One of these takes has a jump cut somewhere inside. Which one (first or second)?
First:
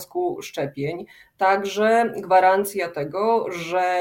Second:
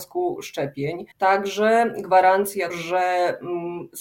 second